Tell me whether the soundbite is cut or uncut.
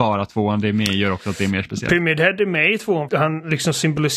cut